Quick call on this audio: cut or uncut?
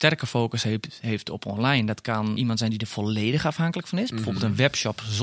cut